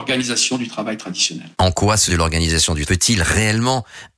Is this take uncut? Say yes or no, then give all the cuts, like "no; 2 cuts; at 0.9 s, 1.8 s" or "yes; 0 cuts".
no; 3 cuts; at 1.5 s, 2.1 s, 2.8 s